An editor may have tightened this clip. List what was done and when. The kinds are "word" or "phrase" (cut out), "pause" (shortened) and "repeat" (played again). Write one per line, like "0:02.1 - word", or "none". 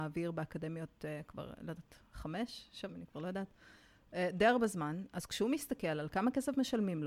0:02.9 - word